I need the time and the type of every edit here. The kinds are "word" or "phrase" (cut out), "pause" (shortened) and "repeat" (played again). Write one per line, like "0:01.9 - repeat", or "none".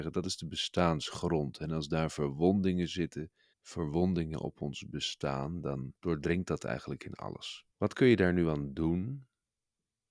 0:03.5 - pause
0:06.0 - pause
0:07.7 - pause